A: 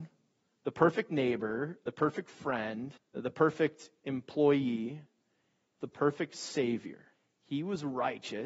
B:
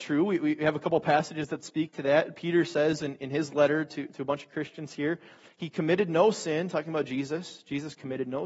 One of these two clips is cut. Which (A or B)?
A